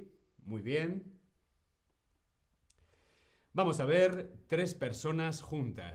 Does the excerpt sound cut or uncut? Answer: uncut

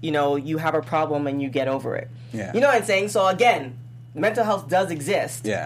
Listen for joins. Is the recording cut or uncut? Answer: uncut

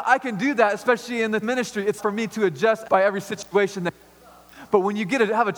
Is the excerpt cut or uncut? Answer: cut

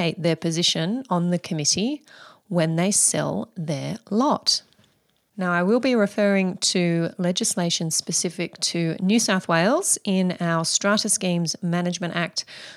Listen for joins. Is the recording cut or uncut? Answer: uncut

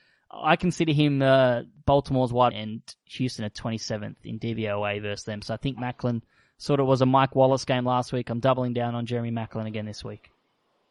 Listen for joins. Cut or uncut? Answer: cut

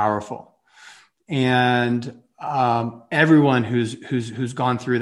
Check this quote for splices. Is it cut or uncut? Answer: uncut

